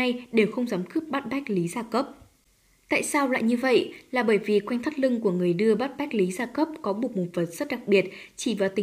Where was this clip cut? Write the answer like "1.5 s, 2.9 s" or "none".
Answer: none